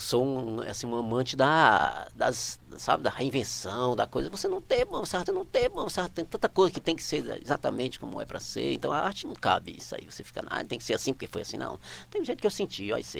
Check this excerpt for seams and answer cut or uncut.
cut